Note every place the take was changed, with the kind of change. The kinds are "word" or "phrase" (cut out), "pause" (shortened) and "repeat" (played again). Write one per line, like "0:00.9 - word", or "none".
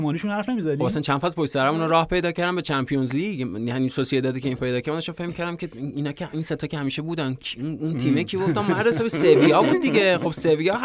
0:04.6 - phrase